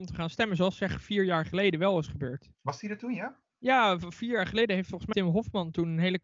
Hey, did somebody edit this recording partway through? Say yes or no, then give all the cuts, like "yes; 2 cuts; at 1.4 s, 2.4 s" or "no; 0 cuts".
yes; 3 cuts; at 2.5 s, 3.5 s, 5.1 s